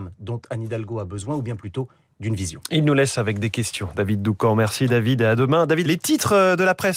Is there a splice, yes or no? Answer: yes